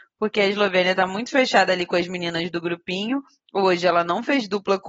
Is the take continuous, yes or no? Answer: yes